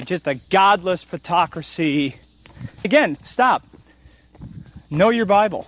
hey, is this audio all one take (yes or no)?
no